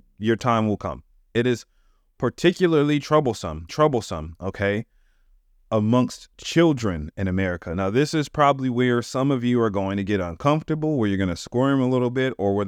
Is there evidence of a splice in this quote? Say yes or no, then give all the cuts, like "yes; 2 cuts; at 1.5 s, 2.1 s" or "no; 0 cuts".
yes; 2 cuts; at 1.1 s, 3.7 s